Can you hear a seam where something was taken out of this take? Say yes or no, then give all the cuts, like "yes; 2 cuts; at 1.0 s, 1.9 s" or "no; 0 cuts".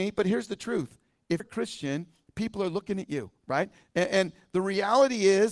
yes; 1 cut; at 1.4 s